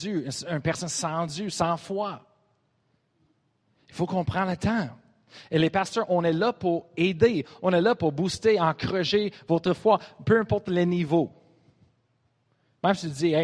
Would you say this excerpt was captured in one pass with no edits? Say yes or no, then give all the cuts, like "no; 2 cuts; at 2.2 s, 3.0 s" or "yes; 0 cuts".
yes; 0 cuts